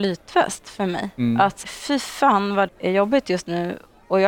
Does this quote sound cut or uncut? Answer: cut